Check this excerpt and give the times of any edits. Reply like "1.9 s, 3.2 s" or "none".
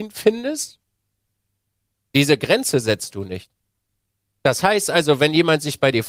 none